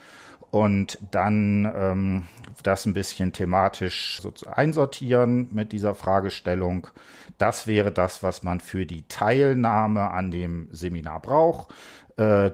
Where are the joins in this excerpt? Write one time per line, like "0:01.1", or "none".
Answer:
0:04.2